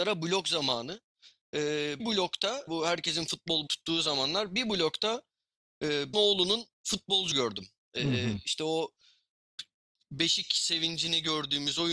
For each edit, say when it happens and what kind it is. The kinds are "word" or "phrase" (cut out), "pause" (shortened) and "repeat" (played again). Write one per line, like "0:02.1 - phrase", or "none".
0:02.0 - word
0:02.7 - word
0:03.7 - word
0:06.1 - word
0:07.3 - word
0:08.0 - word